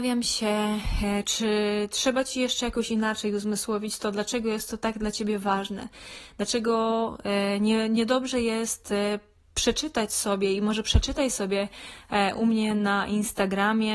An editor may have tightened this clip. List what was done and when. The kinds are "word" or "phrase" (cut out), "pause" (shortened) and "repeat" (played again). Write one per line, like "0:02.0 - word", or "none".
none